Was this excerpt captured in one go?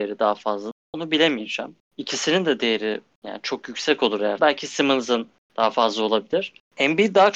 no; 1 cut; at 4.4 s

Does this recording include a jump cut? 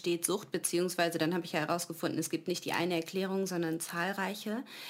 no; 0 cuts

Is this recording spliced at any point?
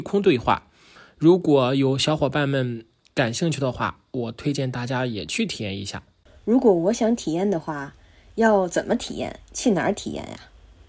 no; 0 cuts

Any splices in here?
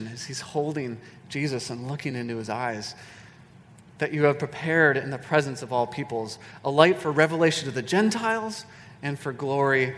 no; 0 cuts

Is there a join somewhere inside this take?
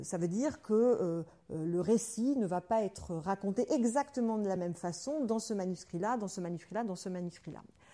no; 0 cuts

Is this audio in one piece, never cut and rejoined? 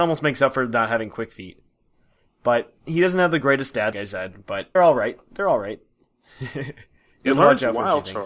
no; 2 cuts; at 3.9 s, 4.8 s

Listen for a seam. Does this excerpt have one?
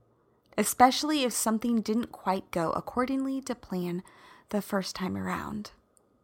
no; 0 cuts

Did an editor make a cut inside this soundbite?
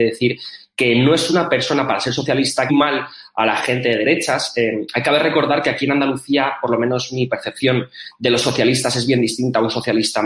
yes; 1 cut; at 2.7 s

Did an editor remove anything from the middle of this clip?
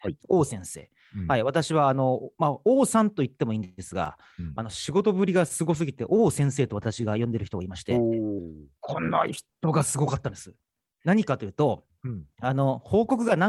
no; 0 cuts

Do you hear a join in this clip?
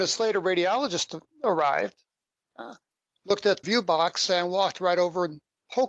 yes; 1 cut; at 3.6 s

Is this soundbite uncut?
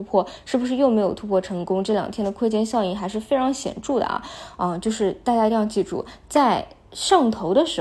yes; 0 cuts

